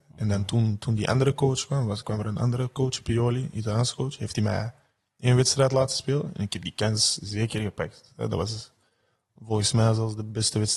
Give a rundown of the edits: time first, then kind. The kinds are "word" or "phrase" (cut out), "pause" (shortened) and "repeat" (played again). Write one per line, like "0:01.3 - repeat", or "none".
none